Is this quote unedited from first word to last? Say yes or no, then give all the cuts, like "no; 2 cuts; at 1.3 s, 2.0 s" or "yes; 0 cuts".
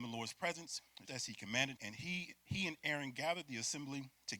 no; 2 cuts; at 1.1 s, 1.8 s